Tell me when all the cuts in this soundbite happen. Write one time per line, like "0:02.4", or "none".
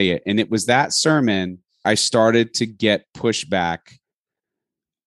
0:01.8

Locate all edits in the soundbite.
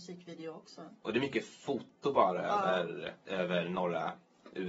0:03.2

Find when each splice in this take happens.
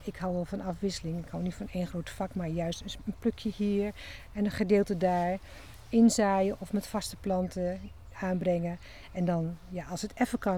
0:08.1

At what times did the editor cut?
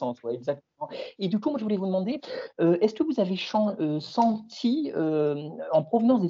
none

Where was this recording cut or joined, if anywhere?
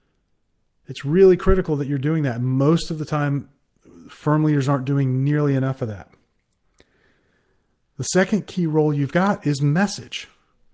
none

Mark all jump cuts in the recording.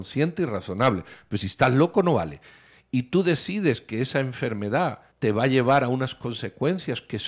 0:05.1

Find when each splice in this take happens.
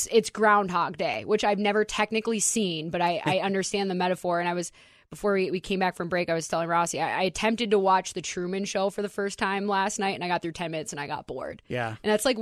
none

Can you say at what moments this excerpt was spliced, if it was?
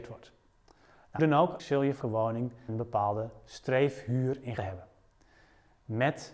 0:01.2
0:01.6
0:02.0
0:02.7
0:04.6

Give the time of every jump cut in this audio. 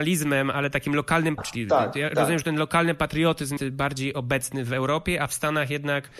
0:01.4
0:03.6

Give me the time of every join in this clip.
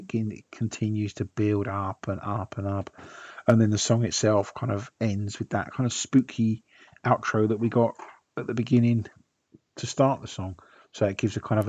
none

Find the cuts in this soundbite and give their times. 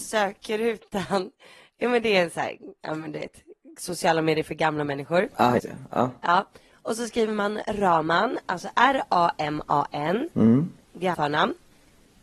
0:05.6
0:11.1

